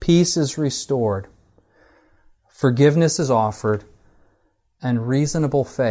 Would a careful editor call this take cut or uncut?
uncut